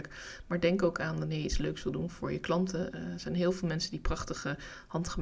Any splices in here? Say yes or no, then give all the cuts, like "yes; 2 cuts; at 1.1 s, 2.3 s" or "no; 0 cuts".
no; 0 cuts